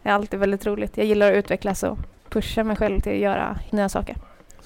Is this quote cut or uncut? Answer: cut